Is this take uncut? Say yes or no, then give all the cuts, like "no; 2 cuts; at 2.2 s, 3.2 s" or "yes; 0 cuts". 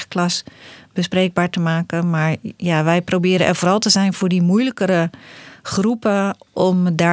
yes; 0 cuts